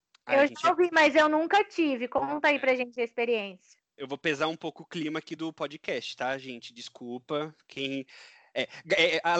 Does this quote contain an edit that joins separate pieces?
no; 0 cuts

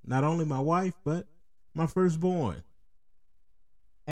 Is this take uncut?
yes; 0 cuts

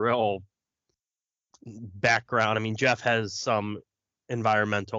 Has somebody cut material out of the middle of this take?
no; 0 cuts

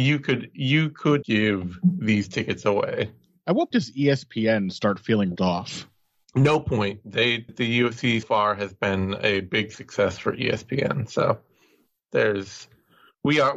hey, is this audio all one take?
no; 5 cuts; at 1.2 s, 3.7 s, 5.4 s, 7.5 s, 8.2 s

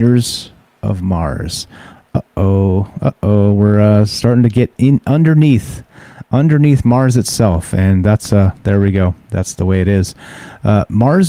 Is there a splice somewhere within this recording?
no; 0 cuts

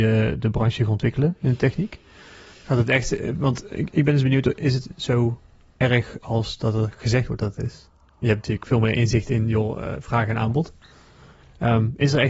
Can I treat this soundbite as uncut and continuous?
yes; 0 cuts

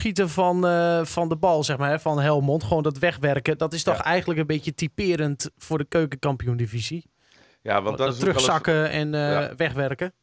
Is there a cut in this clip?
no; 0 cuts

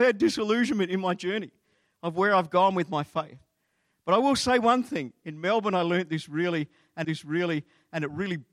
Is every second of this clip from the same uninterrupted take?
no; 1 cut; at 7.0 s

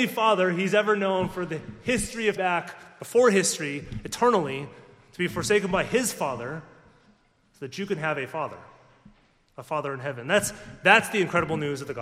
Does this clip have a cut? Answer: yes; 1 cut; at 2.4 s

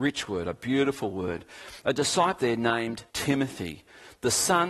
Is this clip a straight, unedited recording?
no; 2 cuts; at 2.4 s, 3.1 s

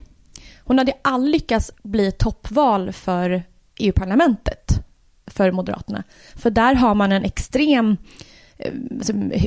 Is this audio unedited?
no; 1 cut; at 1.8 s

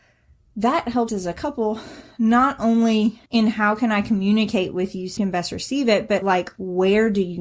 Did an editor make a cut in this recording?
yes; 4 cuts; at 1.1 s, 3.3 s, 5.2 s, 6.2 s

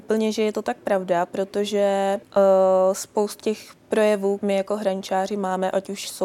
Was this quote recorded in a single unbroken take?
no; 3 cuts; at 2.2 s, 3.4 s, 4.4 s

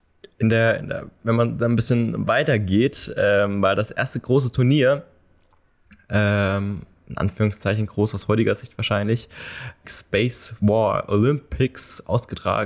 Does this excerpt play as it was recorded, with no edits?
no; 1 cut; at 9.8 s

